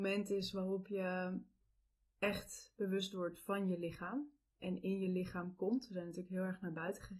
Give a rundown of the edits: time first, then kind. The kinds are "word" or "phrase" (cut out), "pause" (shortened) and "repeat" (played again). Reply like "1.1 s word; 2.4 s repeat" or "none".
none